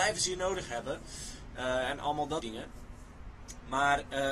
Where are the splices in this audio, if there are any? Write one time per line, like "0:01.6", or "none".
0:02.4